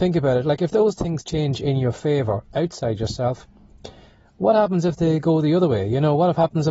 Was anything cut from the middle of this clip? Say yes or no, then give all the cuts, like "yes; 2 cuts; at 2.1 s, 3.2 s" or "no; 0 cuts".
no; 0 cuts